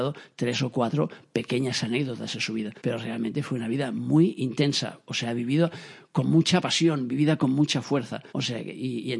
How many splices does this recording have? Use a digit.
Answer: 2